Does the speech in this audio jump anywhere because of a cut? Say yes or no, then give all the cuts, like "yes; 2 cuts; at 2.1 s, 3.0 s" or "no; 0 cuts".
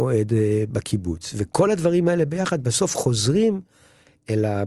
no; 0 cuts